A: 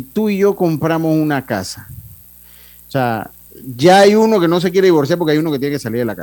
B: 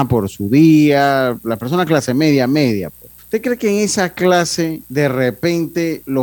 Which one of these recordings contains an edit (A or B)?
B